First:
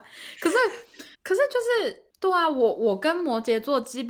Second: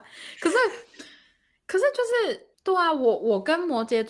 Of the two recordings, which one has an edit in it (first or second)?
first